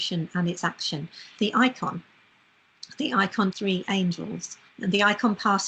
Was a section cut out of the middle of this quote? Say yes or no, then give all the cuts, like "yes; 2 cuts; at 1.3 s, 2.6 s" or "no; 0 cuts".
yes; 3 cuts; at 1.4 s, 3.5 s, 4.7 s